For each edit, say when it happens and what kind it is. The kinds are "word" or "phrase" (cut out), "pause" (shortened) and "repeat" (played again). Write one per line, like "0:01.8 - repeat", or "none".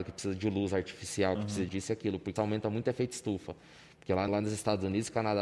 0:01.7 - word
0:02.4 - word
0:04.3 - word

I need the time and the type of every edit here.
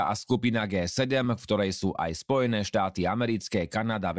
none

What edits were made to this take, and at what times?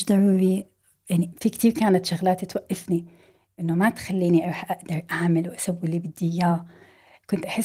none

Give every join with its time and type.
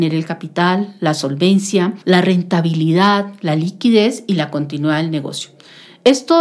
0:02.0 - pause

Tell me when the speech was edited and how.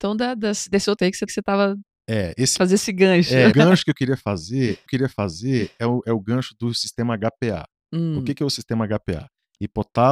0:01.0 - word
0:01.3 - repeat
0:02.6 - word
0:03.5 - word
0:04.9 - repeat

